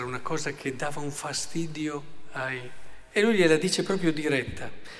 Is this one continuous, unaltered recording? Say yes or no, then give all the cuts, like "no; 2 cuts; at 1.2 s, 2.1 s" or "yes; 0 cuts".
yes; 0 cuts